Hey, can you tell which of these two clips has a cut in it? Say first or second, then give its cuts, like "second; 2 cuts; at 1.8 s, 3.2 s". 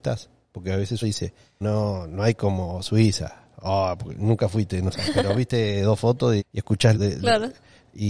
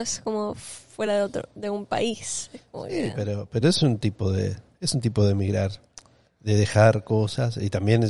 first; 5 cuts; at 1.0 s, 1.6 s, 5.1 s, 6.4 s, 6.9 s